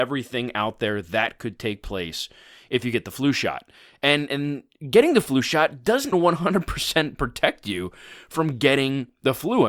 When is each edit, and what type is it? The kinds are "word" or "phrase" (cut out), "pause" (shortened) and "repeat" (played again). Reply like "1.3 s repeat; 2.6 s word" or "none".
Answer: 6.1 s word